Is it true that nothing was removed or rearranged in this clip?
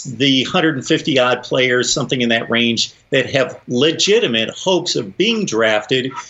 yes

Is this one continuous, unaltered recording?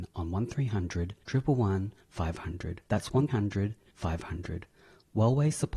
no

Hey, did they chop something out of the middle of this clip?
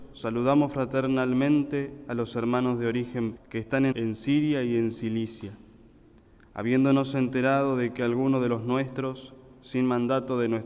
yes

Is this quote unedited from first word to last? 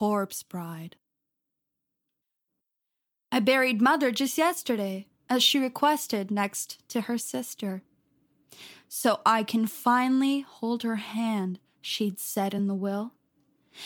yes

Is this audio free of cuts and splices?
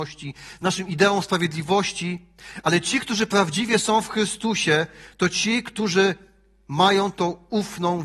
yes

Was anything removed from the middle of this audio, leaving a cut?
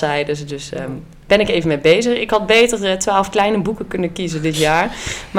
no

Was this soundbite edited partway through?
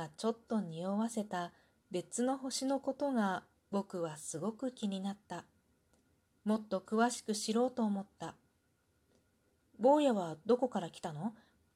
no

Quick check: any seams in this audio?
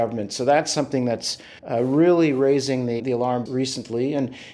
yes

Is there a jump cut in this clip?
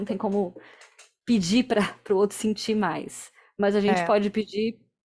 no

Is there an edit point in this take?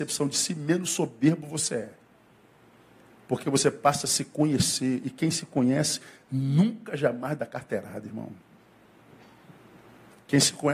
no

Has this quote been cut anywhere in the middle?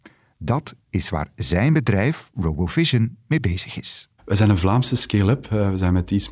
yes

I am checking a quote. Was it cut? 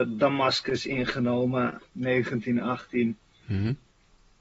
yes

